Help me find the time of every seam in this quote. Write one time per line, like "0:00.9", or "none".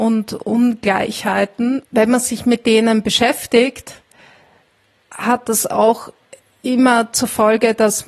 none